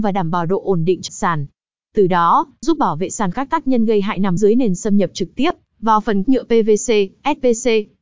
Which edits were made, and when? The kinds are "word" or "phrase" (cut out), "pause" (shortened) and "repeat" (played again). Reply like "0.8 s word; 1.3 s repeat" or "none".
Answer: 1.1 s word; 2.6 s word; 3.3 s word; 4.4 s word; 6.2 s word